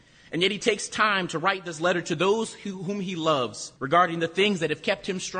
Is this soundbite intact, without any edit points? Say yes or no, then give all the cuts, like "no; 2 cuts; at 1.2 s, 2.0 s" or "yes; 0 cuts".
no; 1 cut; at 3.8 s